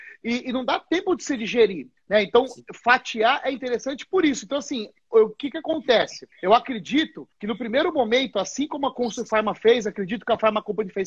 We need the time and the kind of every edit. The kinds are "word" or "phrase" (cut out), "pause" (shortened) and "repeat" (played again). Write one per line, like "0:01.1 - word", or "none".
0:02.0 - pause
0:06.3 - pause
0:07.3 - pause